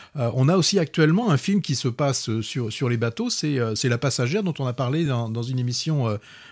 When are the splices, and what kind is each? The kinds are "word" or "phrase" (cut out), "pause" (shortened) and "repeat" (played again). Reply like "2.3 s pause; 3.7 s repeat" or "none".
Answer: none